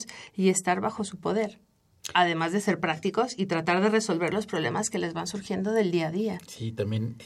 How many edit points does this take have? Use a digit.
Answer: 0